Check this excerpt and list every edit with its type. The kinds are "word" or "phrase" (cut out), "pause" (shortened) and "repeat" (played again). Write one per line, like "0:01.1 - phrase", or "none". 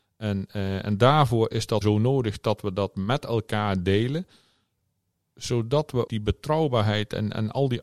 0:01.8 - word
0:06.1 - word